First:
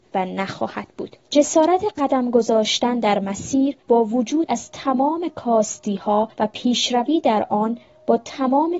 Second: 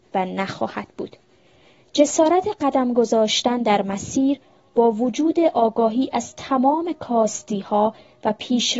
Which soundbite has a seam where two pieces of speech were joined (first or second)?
first